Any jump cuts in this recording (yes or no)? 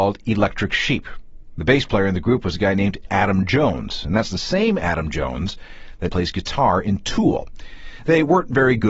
yes